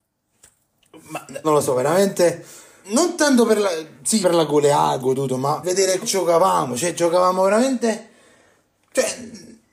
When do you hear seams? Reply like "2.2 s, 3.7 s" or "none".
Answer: 1.4 s, 2.8 s, 4.2 s, 5.0 s, 5.6 s, 6.0 s